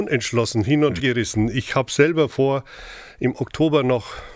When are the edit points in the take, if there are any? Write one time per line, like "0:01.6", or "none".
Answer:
0:01.0